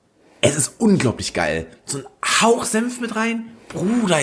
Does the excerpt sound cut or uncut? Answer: uncut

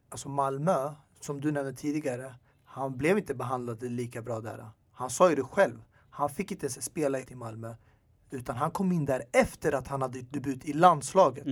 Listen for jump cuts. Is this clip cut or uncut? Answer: cut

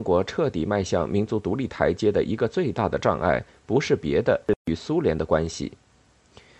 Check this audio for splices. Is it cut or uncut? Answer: uncut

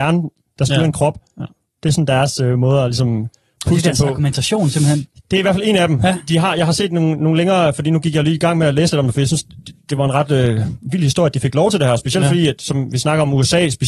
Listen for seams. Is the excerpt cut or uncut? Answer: uncut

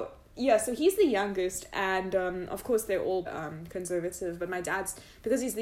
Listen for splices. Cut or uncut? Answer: cut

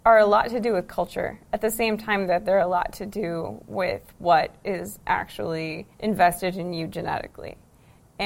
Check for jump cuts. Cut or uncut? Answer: cut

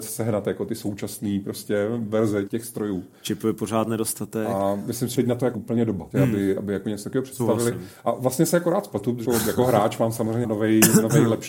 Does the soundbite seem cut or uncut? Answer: cut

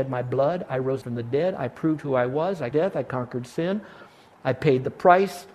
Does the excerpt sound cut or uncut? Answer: cut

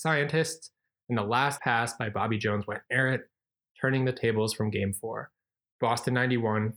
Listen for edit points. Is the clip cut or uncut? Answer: cut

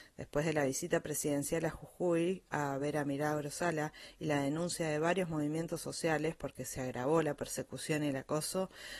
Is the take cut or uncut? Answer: uncut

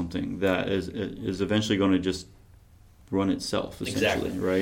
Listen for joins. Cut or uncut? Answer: uncut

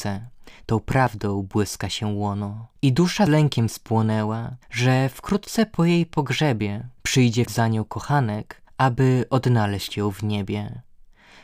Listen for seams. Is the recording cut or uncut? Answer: cut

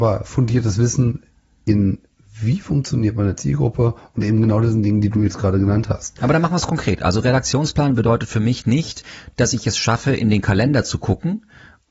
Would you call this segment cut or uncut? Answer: uncut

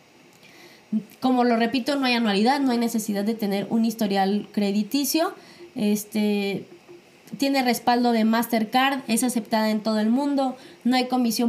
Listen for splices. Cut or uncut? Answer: uncut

